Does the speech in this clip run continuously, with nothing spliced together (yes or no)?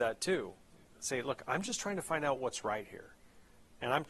yes